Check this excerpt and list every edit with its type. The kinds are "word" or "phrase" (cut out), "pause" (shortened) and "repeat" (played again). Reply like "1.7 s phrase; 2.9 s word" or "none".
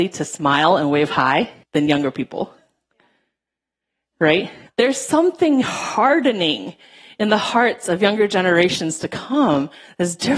1.6 s pause; 4.7 s pause